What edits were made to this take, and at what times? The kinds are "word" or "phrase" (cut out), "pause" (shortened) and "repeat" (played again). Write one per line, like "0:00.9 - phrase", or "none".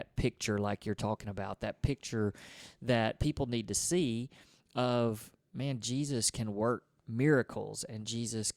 none

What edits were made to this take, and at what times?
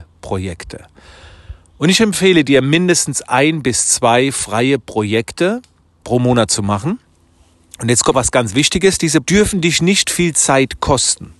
0:06.0 - word
0:08.1 - word
0:09.2 - word

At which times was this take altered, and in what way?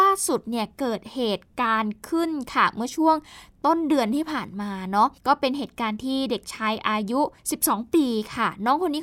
0:05.2 - pause
0:07.4 - pause

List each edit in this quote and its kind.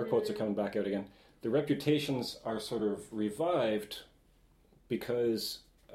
none

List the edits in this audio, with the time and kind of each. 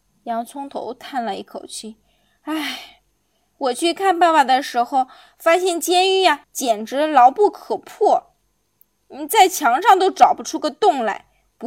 0:06.4 - pause

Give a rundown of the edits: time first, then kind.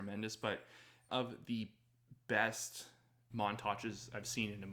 0:01.1 - word
0:03.3 - word

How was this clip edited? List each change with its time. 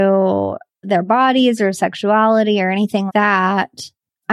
0:03.1 - word

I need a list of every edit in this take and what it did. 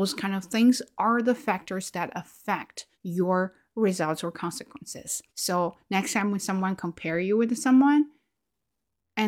0:02.9 - pause
0:05.3 - pause

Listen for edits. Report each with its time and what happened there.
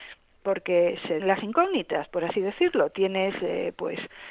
0:01.2 - word

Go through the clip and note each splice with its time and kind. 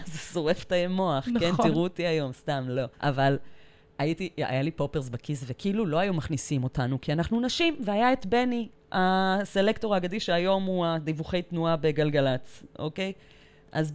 0:02.9 - pause

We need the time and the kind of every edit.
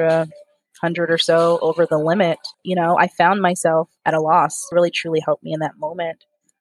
0:02.5 - pause
0:04.7 - phrase

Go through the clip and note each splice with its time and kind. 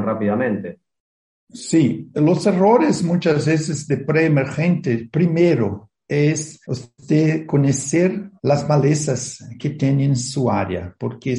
0:06.6 - pause
0:08.4 - pause

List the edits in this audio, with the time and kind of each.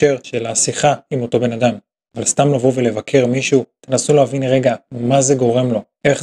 none

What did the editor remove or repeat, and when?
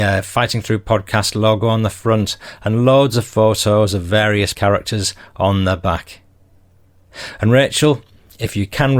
0:04.5 - word

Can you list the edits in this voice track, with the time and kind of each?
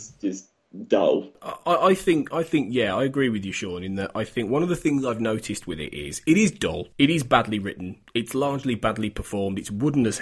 0:06.9 - pause

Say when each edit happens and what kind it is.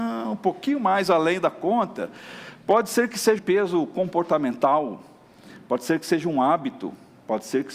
0:03.4 - word

